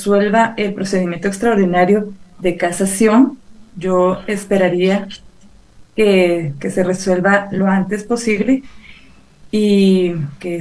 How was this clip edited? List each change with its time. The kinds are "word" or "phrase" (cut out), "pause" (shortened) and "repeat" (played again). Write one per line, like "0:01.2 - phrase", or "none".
none